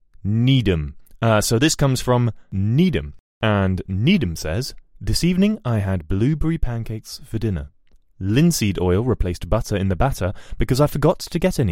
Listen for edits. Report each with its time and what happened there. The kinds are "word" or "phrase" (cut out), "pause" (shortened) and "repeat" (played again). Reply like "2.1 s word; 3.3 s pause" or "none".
none